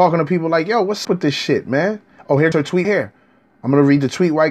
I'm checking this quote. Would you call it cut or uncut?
cut